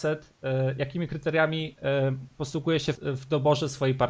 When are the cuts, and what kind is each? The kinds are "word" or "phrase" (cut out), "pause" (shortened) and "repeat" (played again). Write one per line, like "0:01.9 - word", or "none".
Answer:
0:02.3 - pause
0:02.9 - word